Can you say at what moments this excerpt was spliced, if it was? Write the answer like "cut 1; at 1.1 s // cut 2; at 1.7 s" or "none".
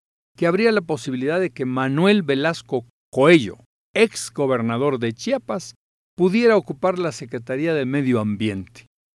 none